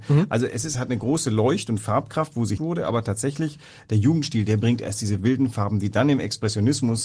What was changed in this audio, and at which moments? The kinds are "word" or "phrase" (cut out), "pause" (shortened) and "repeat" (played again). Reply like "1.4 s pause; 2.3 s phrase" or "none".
2.6 s word; 5.2 s word